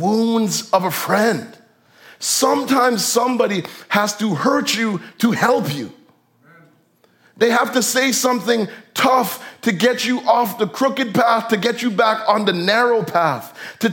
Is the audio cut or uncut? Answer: uncut